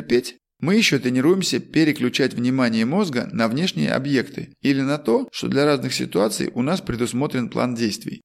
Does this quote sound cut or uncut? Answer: uncut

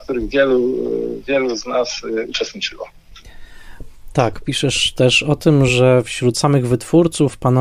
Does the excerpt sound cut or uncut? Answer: uncut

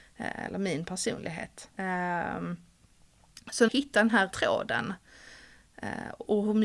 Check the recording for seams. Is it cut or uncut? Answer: cut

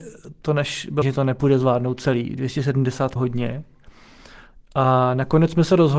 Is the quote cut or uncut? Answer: cut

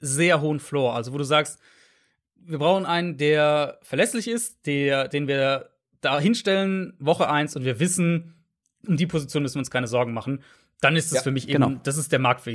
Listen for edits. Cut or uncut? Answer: uncut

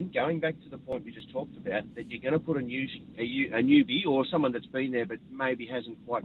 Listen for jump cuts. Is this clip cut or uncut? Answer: uncut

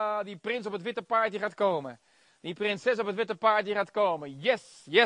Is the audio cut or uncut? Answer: uncut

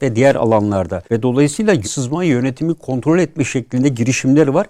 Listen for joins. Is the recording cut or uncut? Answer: cut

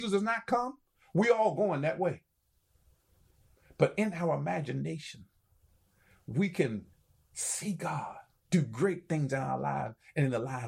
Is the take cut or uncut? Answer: uncut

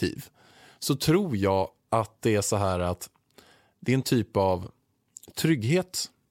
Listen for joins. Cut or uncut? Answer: uncut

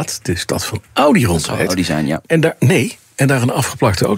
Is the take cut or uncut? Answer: uncut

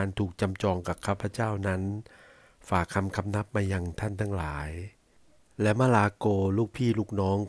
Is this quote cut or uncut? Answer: uncut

